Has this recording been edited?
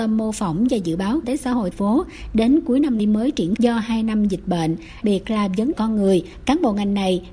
yes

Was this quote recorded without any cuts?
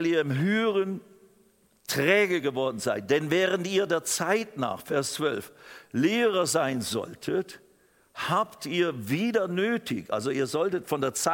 yes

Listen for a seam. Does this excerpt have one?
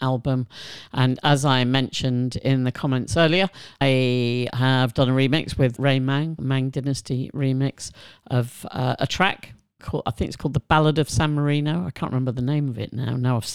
yes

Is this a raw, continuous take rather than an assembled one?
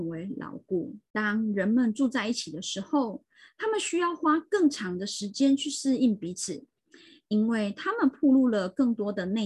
no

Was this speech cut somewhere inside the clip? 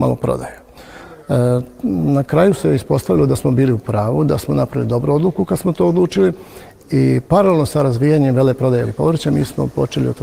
yes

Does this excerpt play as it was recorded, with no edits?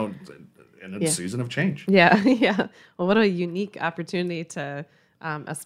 yes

